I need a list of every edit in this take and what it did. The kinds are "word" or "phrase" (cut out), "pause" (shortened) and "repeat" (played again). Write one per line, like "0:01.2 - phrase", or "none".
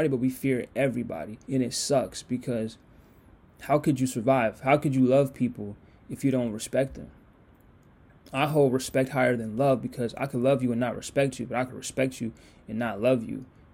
0:01.4 - pause